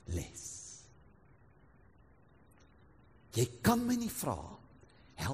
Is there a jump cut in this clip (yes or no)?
no